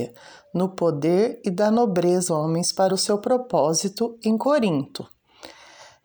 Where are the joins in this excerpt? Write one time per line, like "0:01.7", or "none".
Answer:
0:02.3
0:02.9